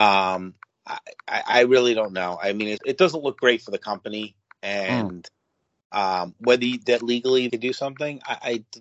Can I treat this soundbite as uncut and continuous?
no; 2 cuts; at 2.8 s, 7.5 s

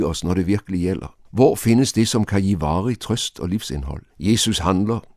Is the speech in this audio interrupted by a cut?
yes; 2 cuts; at 1.2 s, 4.1 s

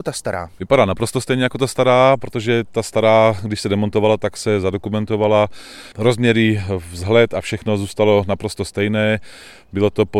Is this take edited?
yes; 1 cut; at 5.9 s

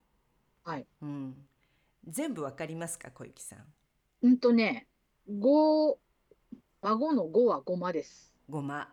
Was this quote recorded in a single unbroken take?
no; 1 cut; at 0.9 s

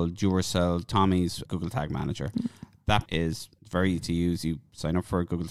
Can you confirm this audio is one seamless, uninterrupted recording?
no; 3 cuts; at 1.5 s, 3.1 s, 3.6 s

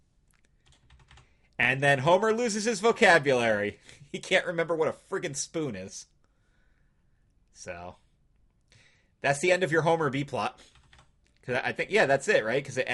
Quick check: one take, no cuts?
yes; 0 cuts

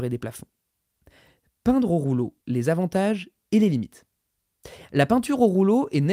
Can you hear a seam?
yes; 1 cut; at 2.4 s

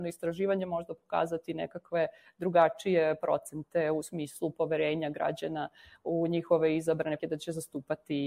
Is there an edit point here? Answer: yes; 1 cut; at 7.2 s

